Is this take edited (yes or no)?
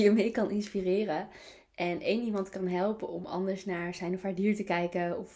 no